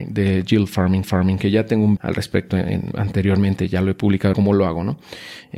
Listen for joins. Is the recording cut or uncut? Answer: cut